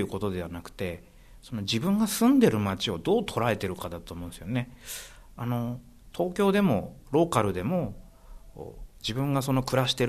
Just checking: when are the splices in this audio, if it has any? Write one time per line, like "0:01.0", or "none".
0:08.9